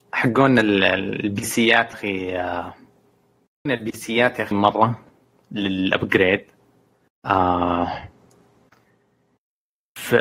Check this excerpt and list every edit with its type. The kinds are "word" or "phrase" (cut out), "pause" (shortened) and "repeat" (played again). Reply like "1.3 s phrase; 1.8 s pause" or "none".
1.9 s word; 3.7 s word; 4.5 s word